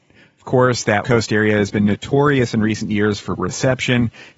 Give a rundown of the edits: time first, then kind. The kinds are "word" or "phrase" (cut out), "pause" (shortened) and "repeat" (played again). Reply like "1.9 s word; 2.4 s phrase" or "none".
1.0 s word; 3.4 s word